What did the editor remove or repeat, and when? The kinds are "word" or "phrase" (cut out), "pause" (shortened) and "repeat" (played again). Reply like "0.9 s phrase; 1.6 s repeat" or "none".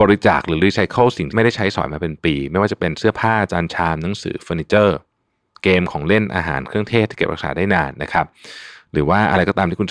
none